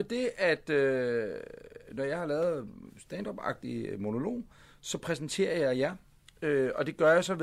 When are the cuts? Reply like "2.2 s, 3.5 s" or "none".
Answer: none